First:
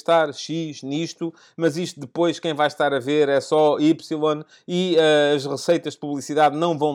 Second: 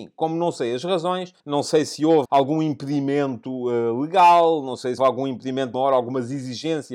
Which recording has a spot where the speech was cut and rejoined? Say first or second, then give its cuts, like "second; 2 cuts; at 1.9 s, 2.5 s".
second; 4 cuts; at 1.4 s, 2.2 s, 5.0 s, 5.7 s